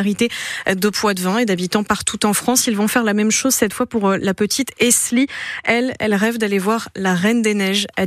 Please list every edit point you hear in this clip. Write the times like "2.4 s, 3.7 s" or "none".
none